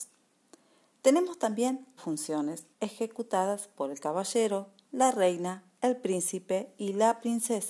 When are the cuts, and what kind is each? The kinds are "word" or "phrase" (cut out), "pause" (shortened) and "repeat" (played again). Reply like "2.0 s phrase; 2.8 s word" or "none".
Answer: 2.0 s word; 2.7 s pause; 4.8 s pause

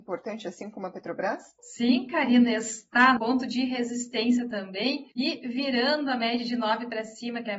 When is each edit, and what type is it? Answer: 1.6 s pause; 3.2 s word; 5.1 s pause

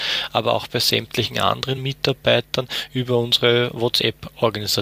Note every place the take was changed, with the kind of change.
none

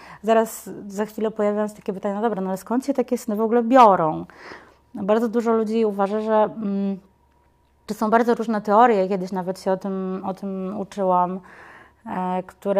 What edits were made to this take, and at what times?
7.9 s word

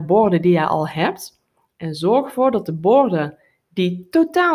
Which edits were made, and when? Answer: none

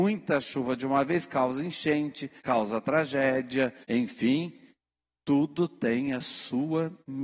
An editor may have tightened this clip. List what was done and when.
2.4 s pause; 3.8 s pause

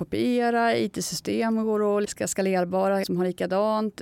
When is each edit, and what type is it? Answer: 2.0 s word; 3.0 s word

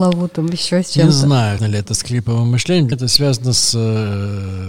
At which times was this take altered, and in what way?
1.6 s word; 2.9 s word

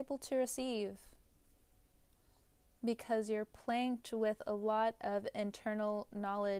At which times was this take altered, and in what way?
none

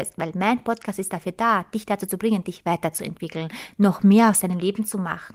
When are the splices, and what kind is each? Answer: none

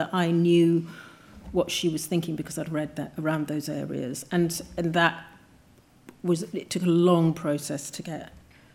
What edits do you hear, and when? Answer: none

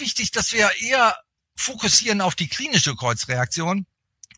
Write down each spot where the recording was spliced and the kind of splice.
1.4 s pause

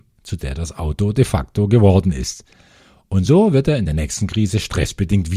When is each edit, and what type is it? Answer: none

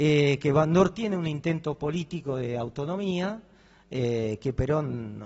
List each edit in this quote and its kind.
none

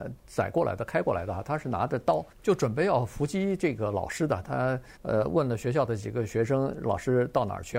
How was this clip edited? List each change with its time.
2.3 s pause; 5.0 s pause

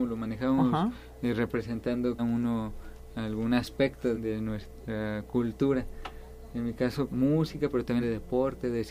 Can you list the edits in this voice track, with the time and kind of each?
2.2 s word; 4.1 s word; 7.1 s word; 8.0 s word

